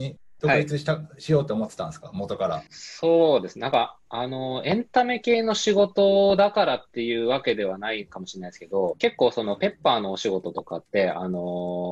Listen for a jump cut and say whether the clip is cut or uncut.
cut